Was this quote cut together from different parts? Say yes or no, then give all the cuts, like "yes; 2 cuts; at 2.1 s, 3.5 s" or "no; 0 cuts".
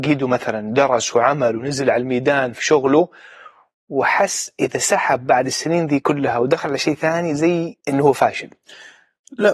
yes; 1 cut; at 7.8 s